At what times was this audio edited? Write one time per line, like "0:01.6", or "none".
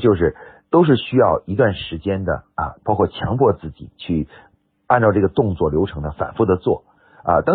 none